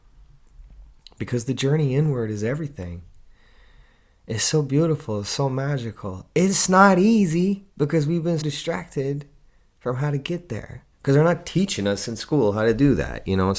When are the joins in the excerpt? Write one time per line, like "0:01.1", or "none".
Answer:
0:01.0
0:07.7
0:08.4
0:10.9

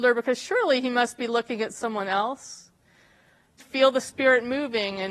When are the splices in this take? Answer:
0:03.6

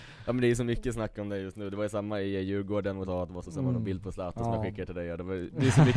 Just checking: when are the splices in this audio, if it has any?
0:03.0
0:03.4

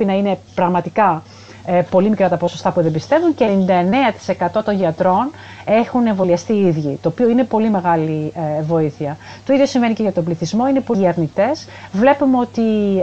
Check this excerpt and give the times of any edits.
0:10.9

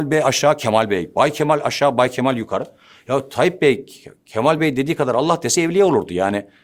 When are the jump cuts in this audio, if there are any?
none

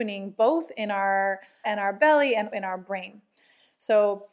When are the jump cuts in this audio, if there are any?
0:01.6
0:02.5

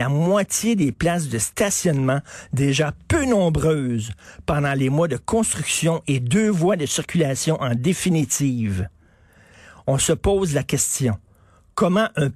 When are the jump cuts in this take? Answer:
none

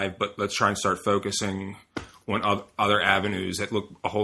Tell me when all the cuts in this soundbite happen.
none

